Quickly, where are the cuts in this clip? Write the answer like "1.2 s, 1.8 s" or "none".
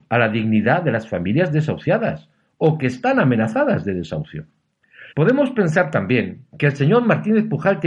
5.1 s, 6.5 s

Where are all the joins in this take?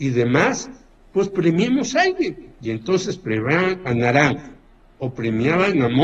none

